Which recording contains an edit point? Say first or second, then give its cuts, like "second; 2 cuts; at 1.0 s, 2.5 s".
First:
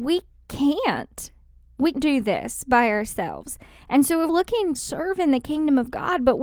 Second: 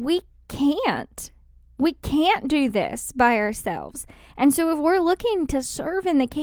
first; 3 cuts; at 1.9 s, 4.3 s, 4.7 s